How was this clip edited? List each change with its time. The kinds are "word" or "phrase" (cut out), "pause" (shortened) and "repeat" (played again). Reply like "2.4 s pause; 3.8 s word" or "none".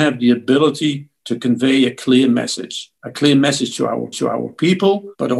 4.1 s repeat

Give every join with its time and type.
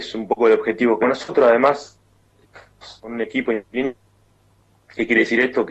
1.0 s word; 3.0 s pause; 3.6 s pause

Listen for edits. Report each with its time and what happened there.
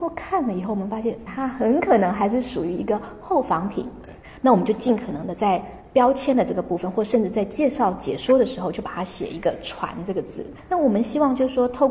1.3 s word

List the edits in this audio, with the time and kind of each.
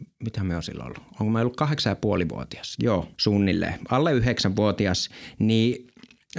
3.1 s pause

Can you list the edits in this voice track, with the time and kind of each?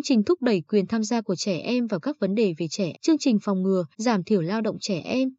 2.9 s word; 3.9 s pause

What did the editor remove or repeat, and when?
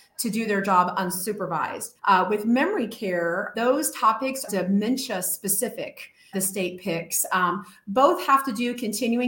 2.0 s pause; 3.5 s word; 4.5 s word; 6.3 s word

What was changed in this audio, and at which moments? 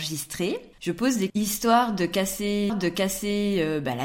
1.3 s phrase; 2.7 s repeat

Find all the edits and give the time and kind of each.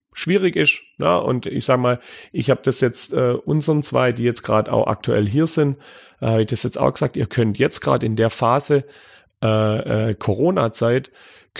1.4 s word

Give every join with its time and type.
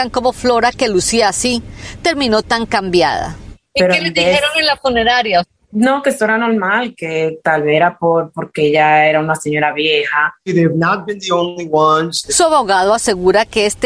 none

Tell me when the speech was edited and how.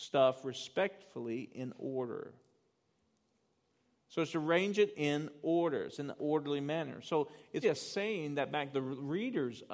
6.2 s word; 7.6 s word; 8.7 s word

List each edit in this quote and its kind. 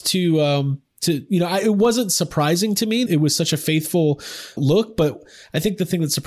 0.9 s pause; 3.1 s word; 4.6 s word

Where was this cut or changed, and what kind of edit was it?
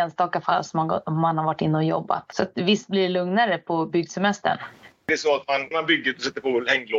5.7 s word

